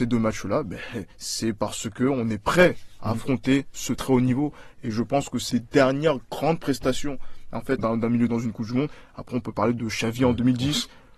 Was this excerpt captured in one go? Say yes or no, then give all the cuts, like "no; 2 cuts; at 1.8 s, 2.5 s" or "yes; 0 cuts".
no; 5 cuts; at 1.1 s, 3.9 s, 5.5 s, 7.8 s, 8.3 s